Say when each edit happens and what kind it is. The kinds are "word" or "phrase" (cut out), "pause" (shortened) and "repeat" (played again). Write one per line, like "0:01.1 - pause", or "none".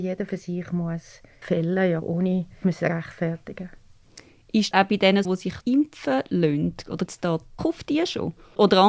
0:01.4 - word
0:02.0 - word
0:02.6 - word
0:04.7 - word
0:05.2 - word
0:05.6 - word
0:07.1 - word
0:07.6 - word